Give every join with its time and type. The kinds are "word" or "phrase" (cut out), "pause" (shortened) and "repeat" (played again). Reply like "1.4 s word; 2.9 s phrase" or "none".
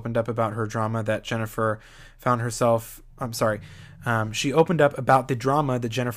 3.1 s pause